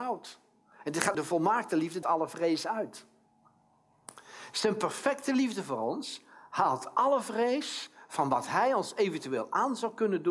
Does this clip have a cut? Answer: yes; 2 cuts; at 1.1 s, 2.0 s

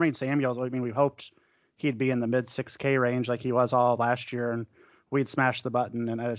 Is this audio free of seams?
yes; 0 cuts

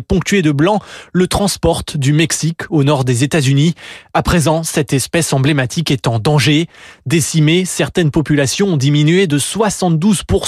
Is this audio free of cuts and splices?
yes; 0 cuts

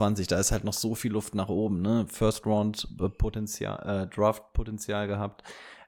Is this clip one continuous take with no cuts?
yes; 0 cuts

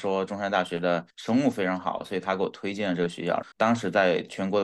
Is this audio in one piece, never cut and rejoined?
no; 2 cuts; at 1.1 s, 3.5 s

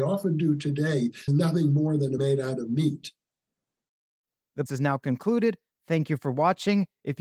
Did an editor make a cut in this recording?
yes; 3 cuts; at 1.3 s, 2.2 s, 4.7 s

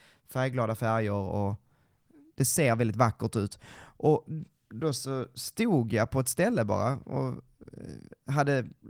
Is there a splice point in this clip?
no; 0 cuts

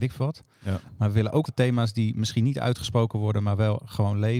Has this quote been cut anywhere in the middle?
yes; 1 cut; at 1.4 s

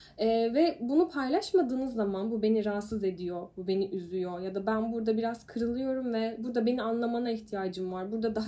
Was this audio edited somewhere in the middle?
no; 0 cuts

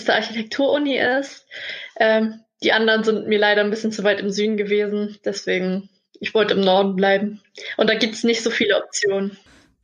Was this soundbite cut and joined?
no; 0 cuts

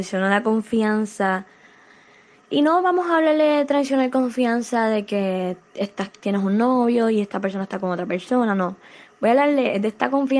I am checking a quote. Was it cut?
no; 0 cuts

